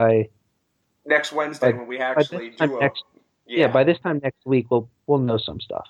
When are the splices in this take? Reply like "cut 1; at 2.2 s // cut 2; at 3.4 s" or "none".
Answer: none